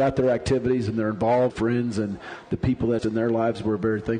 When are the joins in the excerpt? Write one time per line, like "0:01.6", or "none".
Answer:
0:01.5
0:03.0